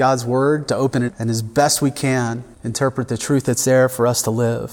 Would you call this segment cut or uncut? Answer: cut